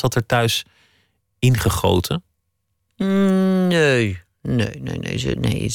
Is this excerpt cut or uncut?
uncut